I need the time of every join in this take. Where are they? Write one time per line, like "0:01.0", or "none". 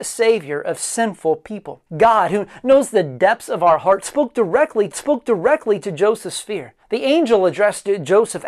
0:01.9
0:04.9
0:06.8